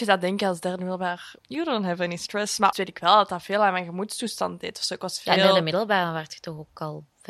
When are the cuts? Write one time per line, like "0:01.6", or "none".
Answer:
0:01.4
0:02.7